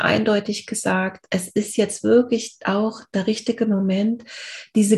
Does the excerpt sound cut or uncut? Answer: uncut